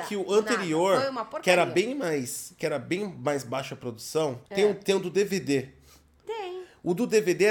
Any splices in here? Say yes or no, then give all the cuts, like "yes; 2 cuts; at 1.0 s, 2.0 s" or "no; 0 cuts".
yes; 1 cut; at 4.5 s